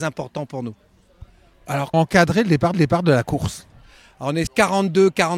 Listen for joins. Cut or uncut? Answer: cut